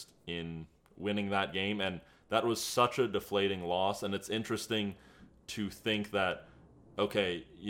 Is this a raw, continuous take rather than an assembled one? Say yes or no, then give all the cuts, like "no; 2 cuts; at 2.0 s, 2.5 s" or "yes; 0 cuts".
yes; 0 cuts